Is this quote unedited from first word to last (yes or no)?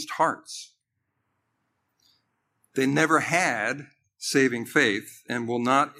yes